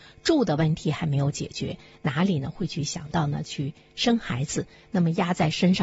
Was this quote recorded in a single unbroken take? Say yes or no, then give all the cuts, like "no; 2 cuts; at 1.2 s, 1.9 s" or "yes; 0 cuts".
yes; 0 cuts